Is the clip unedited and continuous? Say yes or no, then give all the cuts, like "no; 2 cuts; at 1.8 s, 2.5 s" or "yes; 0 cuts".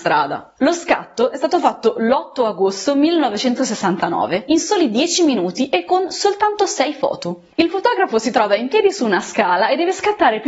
yes; 0 cuts